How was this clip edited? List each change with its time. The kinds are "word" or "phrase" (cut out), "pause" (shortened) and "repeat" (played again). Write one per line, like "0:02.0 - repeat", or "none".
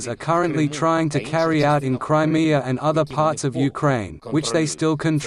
none